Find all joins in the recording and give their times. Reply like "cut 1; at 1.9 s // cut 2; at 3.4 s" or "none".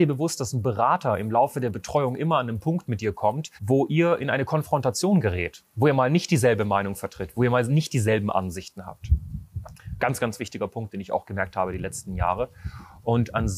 cut 1; at 3.6 s // cut 2; at 5.7 s